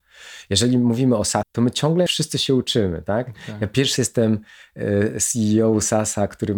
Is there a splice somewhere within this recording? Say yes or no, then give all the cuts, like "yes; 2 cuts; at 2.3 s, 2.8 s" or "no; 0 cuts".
yes; 3 cuts; at 1.4 s, 2.1 s, 4.0 s